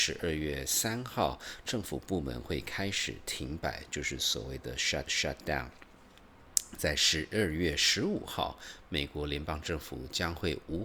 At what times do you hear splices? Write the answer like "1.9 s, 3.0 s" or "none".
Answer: 5.1 s